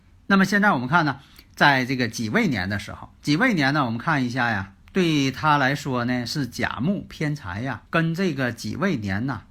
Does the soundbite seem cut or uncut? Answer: cut